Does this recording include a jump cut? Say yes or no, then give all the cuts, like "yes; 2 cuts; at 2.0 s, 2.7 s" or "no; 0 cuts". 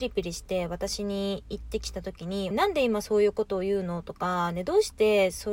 yes; 1 cut; at 2.5 s